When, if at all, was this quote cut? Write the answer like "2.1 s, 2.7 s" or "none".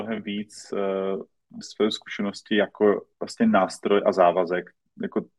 1.6 s, 3.1 s